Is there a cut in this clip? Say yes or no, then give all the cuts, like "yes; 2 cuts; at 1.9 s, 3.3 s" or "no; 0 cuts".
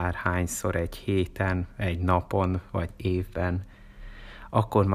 no; 0 cuts